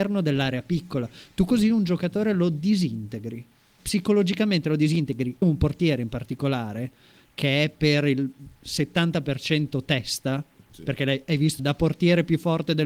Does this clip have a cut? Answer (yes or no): yes